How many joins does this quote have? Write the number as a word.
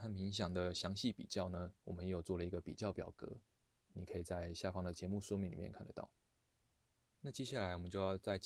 one